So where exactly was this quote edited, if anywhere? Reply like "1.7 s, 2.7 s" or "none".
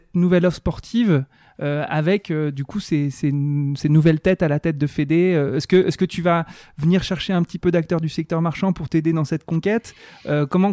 none